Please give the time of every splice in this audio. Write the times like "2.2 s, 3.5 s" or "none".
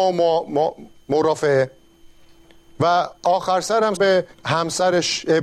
3.2 s, 4.0 s, 4.3 s